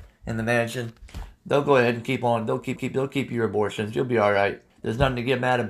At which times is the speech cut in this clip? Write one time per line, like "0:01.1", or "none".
0:02.8
0:04.7